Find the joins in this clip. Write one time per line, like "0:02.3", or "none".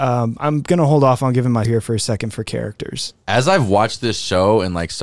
0:01.6